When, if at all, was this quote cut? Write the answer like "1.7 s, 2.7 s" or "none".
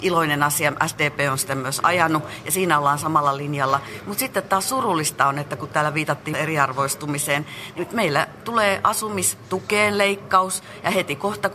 6.3 s